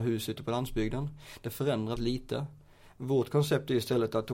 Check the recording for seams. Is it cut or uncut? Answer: cut